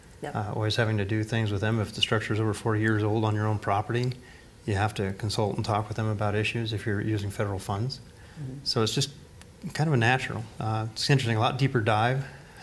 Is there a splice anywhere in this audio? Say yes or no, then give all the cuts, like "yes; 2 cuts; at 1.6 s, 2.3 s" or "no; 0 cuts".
no; 0 cuts